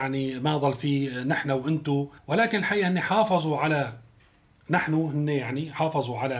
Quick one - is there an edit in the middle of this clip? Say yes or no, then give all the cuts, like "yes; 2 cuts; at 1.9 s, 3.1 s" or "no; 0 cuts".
yes; 1 cut; at 2.2 s